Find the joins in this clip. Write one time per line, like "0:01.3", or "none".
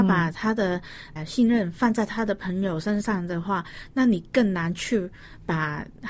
0:01.2